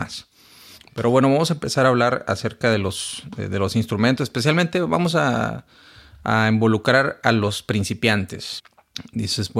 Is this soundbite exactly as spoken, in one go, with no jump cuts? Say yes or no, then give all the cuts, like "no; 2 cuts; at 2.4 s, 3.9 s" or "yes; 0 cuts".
yes; 0 cuts